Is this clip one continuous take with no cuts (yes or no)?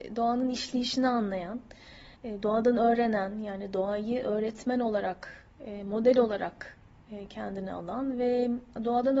no